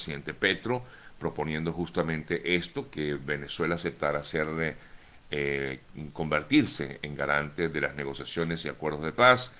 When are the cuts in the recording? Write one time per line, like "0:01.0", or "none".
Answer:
none